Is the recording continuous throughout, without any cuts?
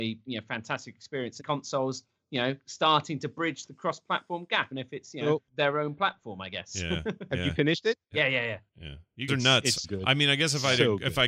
no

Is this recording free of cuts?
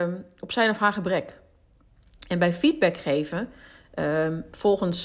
yes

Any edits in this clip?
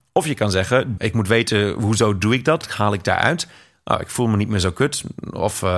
yes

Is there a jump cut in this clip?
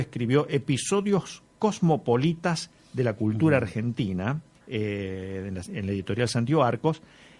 yes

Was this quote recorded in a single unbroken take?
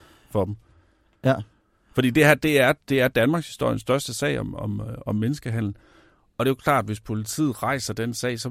yes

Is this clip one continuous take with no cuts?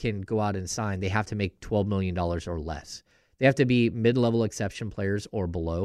yes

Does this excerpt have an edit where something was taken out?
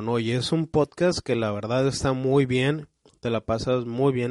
no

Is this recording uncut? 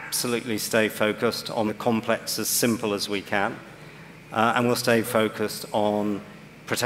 no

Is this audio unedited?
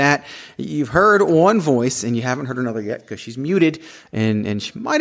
yes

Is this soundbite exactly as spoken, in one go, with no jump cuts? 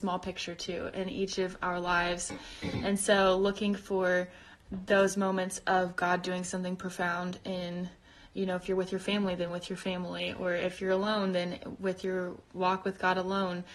yes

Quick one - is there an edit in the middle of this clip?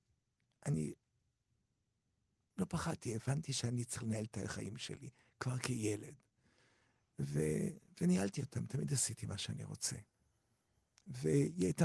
no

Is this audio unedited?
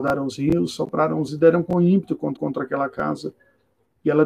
no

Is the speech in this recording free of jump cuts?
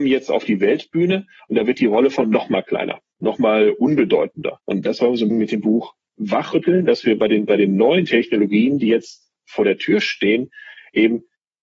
no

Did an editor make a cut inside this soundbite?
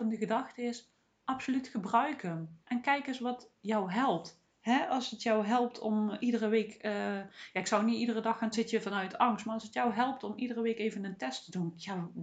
yes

